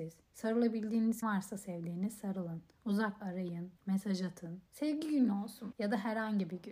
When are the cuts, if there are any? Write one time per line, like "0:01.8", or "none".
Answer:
0:01.2
0:03.2
0:03.8
0:04.7
0:05.7